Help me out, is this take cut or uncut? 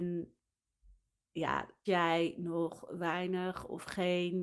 cut